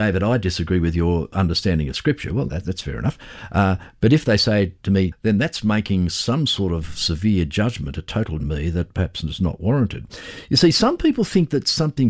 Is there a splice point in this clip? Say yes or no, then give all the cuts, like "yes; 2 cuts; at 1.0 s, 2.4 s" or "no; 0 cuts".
yes; 3 cuts; at 2.5 s, 5.1 s, 8.4 s